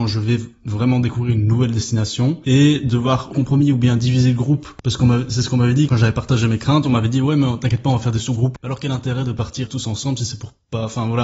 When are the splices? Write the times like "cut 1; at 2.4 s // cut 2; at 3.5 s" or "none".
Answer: cut 1; at 3.3 s // cut 2; at 5.9 s // cut 3; at 9.7 s